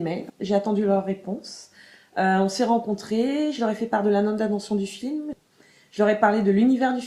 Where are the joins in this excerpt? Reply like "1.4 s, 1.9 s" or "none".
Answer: none